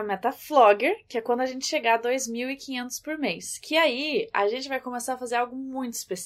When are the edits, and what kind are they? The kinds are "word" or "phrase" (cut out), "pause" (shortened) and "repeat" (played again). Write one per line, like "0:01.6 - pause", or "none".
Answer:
none